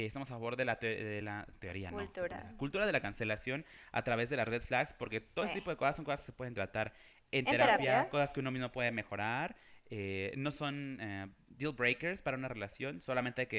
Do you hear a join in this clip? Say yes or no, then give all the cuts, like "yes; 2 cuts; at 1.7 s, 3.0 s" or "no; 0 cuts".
no; 0 cuts